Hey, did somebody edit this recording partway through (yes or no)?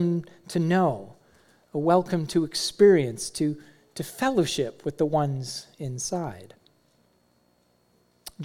no